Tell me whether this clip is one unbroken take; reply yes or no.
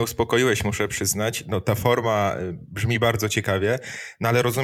yes